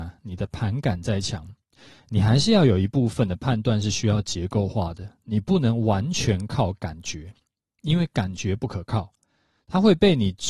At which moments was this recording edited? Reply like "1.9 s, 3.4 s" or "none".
none